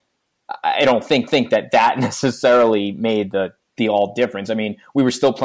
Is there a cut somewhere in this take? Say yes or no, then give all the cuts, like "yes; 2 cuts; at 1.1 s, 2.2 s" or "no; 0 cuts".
yes; 1 cut; at 1.3 s